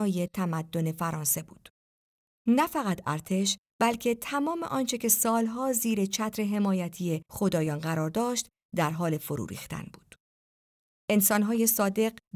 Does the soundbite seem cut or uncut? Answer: uncut